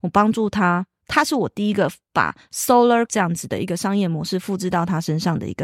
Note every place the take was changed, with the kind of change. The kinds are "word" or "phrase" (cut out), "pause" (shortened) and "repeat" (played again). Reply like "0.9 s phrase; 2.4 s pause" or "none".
3.1 s word